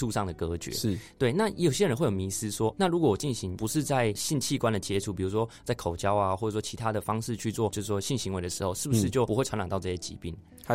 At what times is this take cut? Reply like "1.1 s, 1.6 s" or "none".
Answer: 2.7 s